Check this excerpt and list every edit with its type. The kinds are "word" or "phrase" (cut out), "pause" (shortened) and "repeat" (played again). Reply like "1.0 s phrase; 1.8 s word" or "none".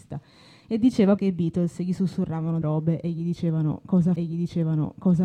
1.2 s word; 2.6 s word; 4.2 s repeat